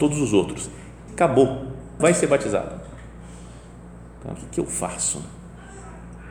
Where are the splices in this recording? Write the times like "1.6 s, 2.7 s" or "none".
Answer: 1.1 s, 2.0 s, 4.4 s

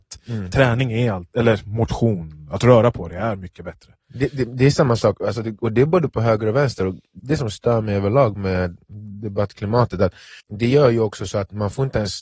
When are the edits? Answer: 7.2 s, 10.4 s

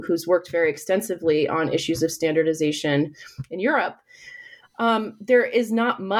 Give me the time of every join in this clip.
none

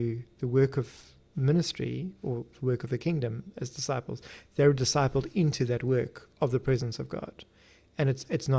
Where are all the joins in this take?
none

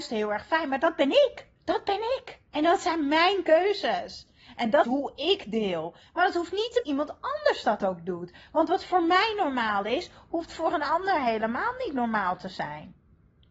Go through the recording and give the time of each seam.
1.6 s, 2.5 s, 4.8 s, 6.8 s

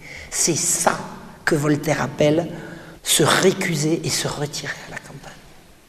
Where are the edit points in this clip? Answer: 3.0 s

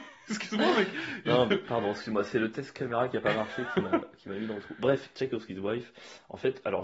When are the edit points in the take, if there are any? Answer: none

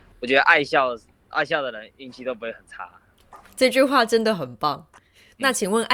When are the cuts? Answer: none

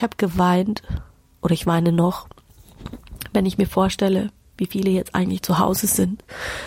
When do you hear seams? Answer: none

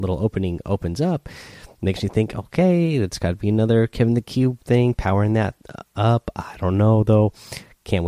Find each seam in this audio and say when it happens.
none

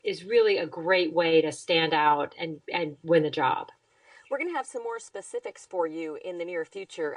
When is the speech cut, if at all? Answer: none

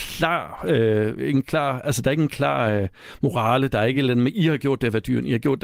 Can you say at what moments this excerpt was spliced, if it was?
none

